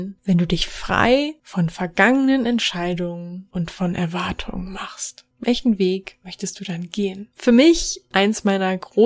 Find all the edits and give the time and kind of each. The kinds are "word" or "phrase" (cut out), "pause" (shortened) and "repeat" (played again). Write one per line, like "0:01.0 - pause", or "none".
0:07.3 - pause